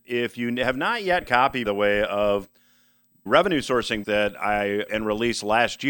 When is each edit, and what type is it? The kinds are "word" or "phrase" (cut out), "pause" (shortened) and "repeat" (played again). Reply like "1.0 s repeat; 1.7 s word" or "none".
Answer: 1.2 s word; 1.6 s word; 3.3 s word; 4.0 s word; 4.9 s word